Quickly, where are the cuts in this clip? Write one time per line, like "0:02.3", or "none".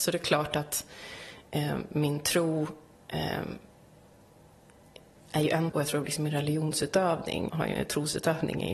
0:05.7
0:07.5